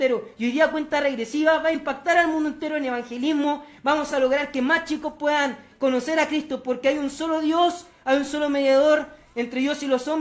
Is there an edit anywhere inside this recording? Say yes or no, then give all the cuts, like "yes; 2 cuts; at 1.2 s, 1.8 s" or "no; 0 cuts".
no; 0 cuts